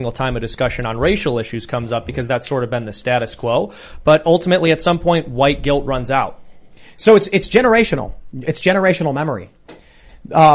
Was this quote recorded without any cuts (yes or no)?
yes